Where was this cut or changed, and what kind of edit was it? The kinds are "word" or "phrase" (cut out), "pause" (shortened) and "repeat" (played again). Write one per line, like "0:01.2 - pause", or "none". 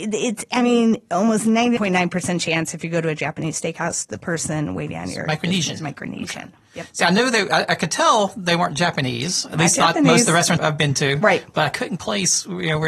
0:01.8 - word
0:10.6 - word
0:12.0 - word